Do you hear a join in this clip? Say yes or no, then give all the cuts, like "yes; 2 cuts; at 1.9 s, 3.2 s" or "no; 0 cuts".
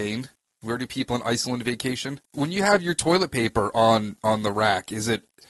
yes; 1 cut; at 2.2 s